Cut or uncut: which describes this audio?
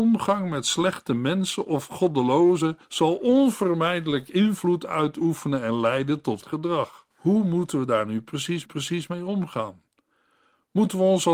cut